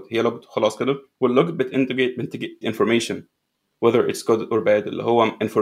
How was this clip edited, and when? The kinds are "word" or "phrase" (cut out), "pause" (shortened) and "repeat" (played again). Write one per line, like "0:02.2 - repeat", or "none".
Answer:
0:01.1 - pause
0:02.6 - word